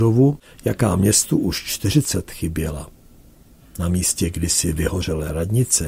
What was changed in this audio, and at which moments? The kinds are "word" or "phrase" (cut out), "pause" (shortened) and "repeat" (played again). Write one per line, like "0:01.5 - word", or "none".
0:02.3 - word